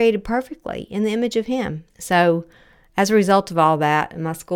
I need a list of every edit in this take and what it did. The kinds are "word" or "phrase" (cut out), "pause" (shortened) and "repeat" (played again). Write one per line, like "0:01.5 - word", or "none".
0:01.9 - pause